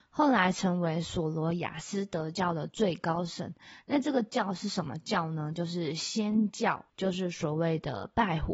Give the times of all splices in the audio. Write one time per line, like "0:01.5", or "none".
0:06.9